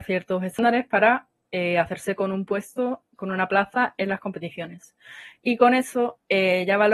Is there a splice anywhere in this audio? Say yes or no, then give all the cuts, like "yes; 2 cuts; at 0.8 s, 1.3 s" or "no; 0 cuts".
no; 0 cuts